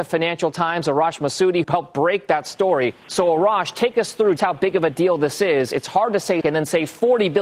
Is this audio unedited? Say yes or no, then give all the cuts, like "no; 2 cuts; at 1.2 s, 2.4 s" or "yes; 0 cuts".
no; 4 cuts; at 1.6 s, 3.0 s, 4.4 s, 6.4 s